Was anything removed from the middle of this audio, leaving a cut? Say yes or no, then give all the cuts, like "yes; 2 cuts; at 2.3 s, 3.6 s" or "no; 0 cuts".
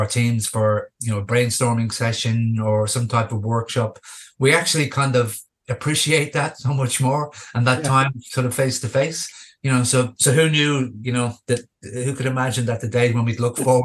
no; 0 cuts